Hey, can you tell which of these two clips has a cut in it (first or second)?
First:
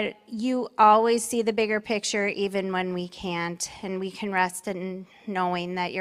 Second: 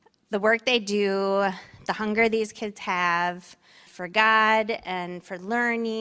second